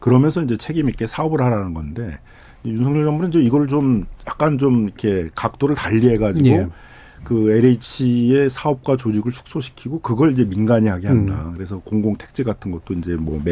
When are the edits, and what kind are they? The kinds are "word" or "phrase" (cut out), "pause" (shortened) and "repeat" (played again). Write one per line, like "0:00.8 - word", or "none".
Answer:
none